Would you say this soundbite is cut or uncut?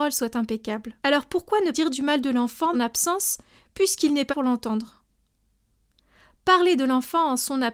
cut